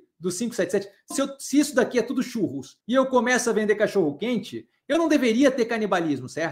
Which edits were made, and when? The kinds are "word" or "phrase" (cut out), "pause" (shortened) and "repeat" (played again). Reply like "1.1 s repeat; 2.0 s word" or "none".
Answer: 1.1 s word; 2.8 s pause

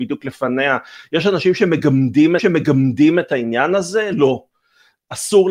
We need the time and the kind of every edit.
2.4 s repeat

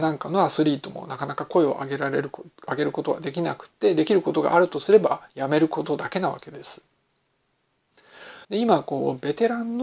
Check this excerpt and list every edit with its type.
5.3 s pause; 8.4 s pause

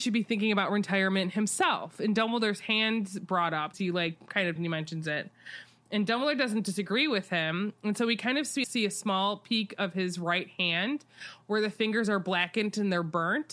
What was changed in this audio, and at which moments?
3.7 s word; 4.6 s phrase; 8.6 s word

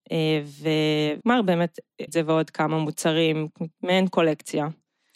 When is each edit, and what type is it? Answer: 1.2 s word; 2.1 s word; 3.7 s pause

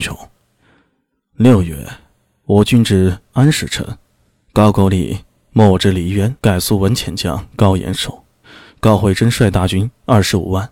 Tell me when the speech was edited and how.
6.4 s pause

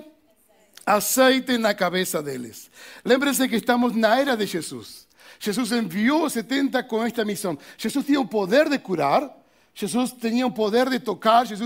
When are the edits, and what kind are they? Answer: none

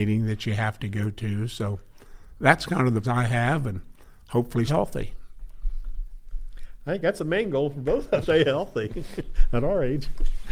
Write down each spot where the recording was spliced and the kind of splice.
2.4 s word; 3.0 s word; 4.7 s word; 8.2 s word

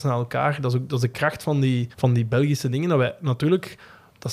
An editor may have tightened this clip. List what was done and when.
1.9 s pause

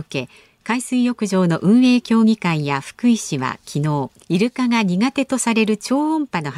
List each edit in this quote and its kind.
4.2 s pause

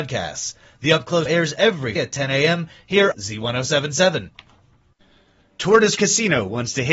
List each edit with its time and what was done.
1.3 s word; 2.0 s word; 3.1 s word; 6.0 s word

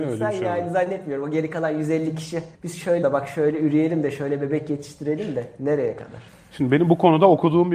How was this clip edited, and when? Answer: 2.5 s pause; 3.0 s word; 6.3 s pause

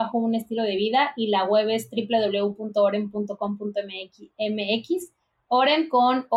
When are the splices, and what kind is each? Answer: 4.3 s pause

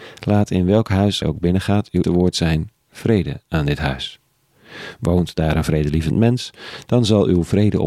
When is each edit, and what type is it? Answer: 1.2 s word; 2.0 s word

